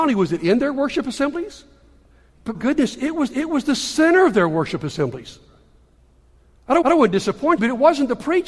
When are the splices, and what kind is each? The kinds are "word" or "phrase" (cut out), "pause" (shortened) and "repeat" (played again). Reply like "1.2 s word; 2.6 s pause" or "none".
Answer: 2.5 s word; 3.3 s repeat; 6.8 s repeat; 7.6 s word